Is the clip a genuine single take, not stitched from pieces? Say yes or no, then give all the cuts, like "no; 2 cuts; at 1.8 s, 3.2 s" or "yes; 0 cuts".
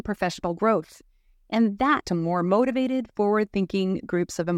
no; 1 cut; at 2.0 s